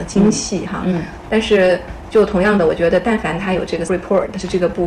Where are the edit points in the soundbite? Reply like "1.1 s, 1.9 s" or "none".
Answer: 1.2 s, 3.9 s